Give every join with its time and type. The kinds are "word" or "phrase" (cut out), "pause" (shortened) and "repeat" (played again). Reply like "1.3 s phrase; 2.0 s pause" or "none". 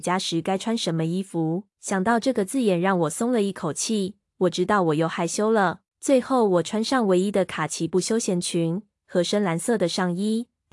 1.7 s pause; 5.9 s pause